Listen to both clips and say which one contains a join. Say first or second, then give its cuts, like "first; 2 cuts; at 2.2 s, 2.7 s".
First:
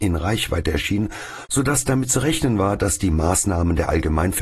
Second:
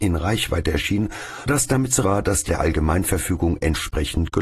second; 3 cuts; at 1.5 s, 2.0 s, 2.5 s